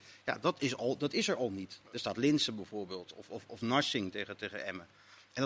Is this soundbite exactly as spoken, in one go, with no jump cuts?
no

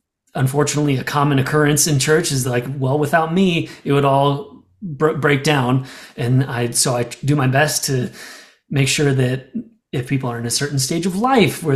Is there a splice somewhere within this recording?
no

